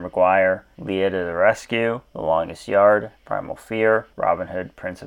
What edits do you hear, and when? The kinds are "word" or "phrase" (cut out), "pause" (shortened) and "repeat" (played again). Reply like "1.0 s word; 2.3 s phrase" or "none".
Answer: none